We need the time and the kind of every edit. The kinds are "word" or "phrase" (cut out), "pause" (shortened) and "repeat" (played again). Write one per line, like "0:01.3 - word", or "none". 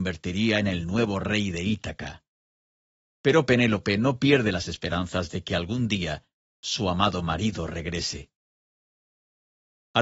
none